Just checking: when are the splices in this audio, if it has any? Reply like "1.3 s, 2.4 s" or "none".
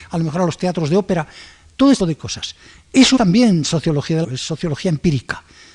2.0 s, 3.2 s, 4.2 s